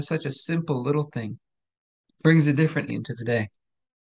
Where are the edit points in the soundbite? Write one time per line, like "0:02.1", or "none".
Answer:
0:02.9

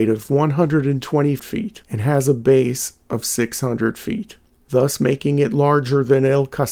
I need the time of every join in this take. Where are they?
none

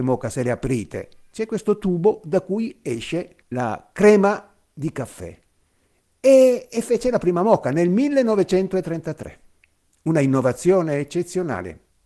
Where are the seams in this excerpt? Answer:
none

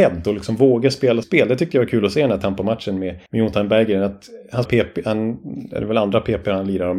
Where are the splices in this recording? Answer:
0:01.2
0:03.3
0:04.7

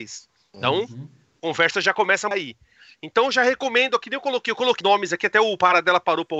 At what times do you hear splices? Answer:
0:02.3
0:04.8

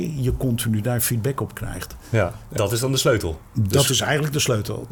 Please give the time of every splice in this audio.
0:02.6

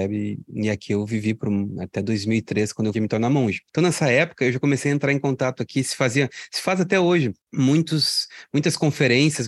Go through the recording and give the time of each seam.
0:02.9
0:07.4

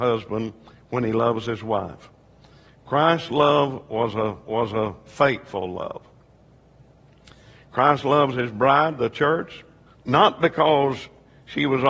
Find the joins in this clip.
0:04.4
0:09.9

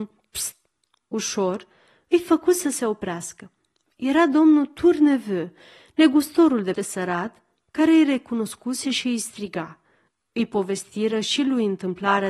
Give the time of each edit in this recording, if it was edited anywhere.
0:06.7

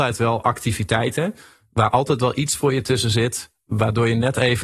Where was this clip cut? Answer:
none

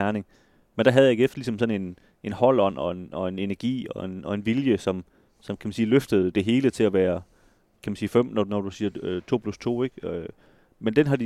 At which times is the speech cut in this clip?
none

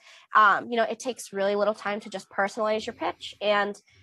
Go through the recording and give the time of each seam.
none

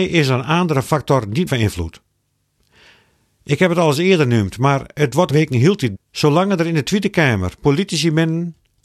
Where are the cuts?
0:01.5
0:05.3
0:05.9

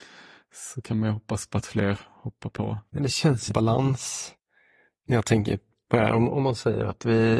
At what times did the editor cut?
0:02.9
0:03.5

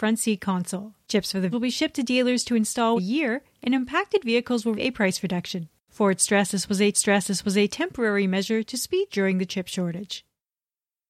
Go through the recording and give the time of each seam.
0:01.0
0:01.5
0:03.0
0:04.7
0:06.9
0:09.1

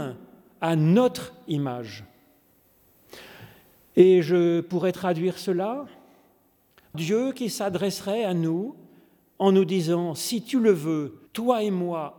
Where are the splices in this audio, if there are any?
0:06.9
0:11.3

